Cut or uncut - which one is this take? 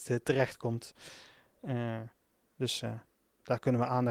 uncut